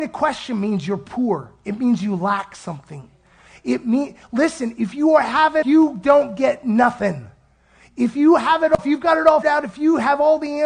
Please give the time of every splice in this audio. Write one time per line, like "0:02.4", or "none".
0:05.6
0:08.8
0:09.4